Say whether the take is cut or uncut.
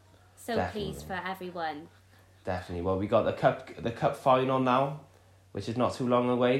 uncut